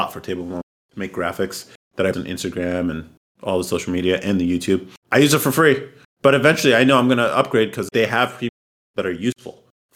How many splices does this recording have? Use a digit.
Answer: 2